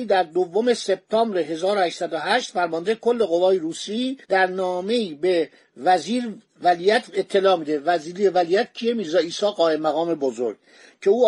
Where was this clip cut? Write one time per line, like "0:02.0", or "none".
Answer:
0:04.2